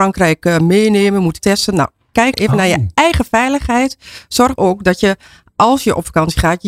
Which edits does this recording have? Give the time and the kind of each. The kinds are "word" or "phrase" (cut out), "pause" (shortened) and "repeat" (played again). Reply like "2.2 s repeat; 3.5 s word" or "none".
1.4 s phrase; 2.3 s word; 4.6 s word